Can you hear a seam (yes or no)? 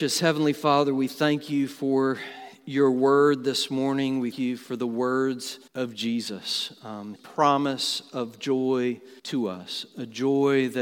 yes